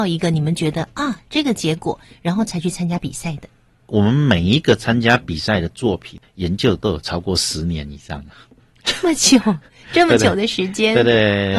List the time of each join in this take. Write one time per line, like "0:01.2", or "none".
none

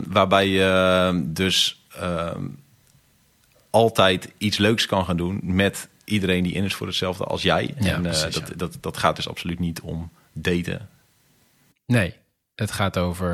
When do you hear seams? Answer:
none

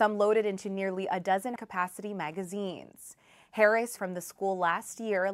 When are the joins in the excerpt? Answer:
0:01.6
0:04.0

